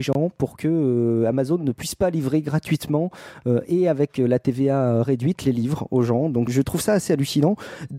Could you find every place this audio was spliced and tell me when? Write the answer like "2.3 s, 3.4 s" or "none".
6.5 s